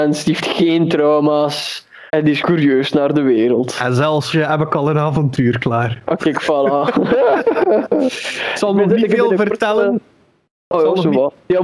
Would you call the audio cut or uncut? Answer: cut